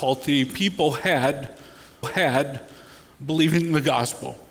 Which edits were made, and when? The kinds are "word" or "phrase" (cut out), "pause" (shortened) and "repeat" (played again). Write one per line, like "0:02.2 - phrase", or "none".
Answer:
0:02.0 - repeat